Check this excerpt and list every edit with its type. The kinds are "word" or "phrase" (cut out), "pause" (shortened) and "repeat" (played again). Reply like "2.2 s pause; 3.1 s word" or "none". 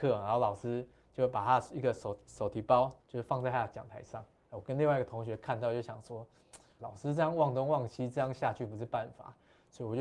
3.0 s pause; 6.8 s word